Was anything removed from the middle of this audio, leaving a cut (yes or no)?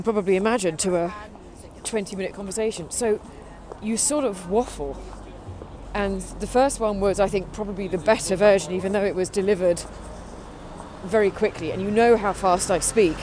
no